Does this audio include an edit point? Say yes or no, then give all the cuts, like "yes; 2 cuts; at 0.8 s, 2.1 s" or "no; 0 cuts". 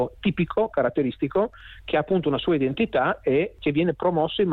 no; 0 cuts